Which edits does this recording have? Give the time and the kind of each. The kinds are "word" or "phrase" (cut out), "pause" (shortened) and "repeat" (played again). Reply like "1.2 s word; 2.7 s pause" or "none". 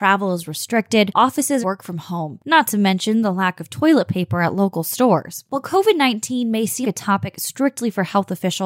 1.6 s phrase; 6.8 s word

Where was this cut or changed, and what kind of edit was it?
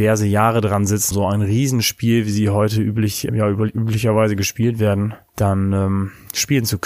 1.1 s word; 3.3 s word; 5.3 s pause

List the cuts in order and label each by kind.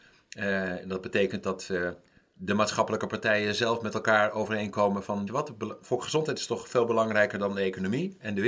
5.3 s word

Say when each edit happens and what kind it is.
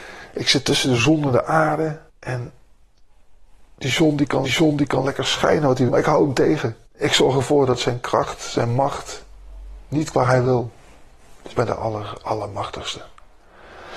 2.1 s pause; 4.4 s repeat; 5.9 s word; 6.9 s pause; 10.1 s word; 11.5 s word

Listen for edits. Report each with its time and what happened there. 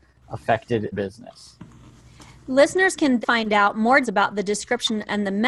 0.9 s word; 3.2 s word; 4.0 s word

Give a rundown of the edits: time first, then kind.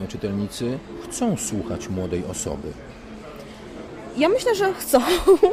none

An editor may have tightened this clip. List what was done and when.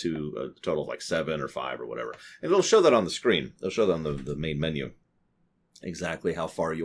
none

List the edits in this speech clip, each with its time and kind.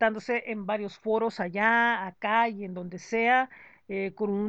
none

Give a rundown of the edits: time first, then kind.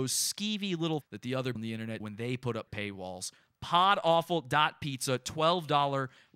1.0 s word; 1.5 s word; 2.0 s word; 2.7 s word

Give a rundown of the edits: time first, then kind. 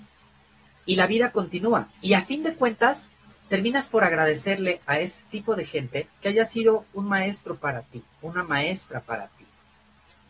1.9 s pause; 6.1 s pause; 8.1 s pause

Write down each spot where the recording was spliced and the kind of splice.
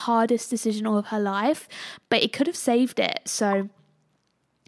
none

